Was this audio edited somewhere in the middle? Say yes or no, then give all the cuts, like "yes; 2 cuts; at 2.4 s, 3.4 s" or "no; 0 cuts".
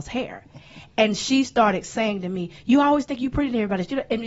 no; 0 cuts